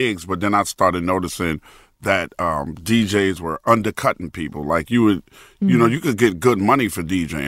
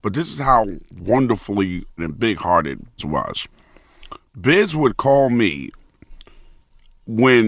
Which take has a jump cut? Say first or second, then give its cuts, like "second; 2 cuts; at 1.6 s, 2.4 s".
second; 2 cuts; at 2.0 s, 3.0 s